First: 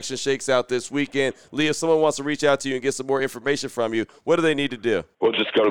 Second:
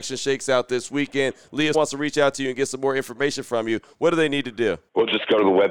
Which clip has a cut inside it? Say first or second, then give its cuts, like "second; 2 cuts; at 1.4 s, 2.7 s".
second; 1 cut; at 1.7 s